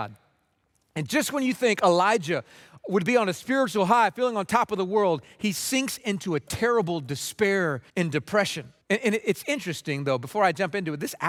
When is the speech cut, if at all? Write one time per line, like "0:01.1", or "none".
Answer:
0:07.9
0:08.8